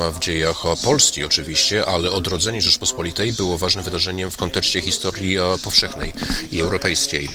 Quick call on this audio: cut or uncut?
uncut